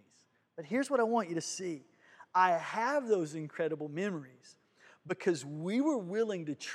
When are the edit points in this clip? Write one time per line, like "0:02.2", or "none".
none